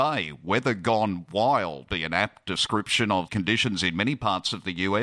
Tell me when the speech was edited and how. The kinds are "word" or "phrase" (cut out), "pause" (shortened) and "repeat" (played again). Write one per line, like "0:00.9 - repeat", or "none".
0:01.9 - word
0:03.3 - word